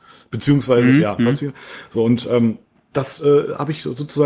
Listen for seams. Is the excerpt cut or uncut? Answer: uncut